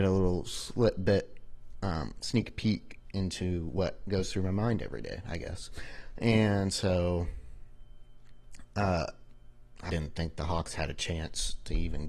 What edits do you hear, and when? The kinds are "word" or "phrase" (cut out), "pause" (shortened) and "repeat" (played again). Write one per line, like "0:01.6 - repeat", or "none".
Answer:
0:09.9 - word